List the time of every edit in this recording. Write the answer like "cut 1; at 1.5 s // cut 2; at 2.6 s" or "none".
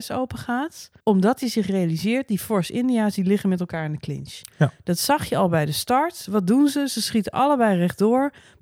cut 1; at 1.0 s